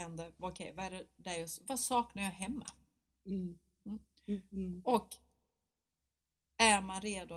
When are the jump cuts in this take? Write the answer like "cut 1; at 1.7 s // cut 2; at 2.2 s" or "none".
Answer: none